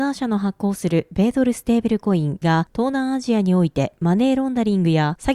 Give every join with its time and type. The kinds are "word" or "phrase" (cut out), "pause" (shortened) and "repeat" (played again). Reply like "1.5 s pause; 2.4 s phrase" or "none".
2.4 s word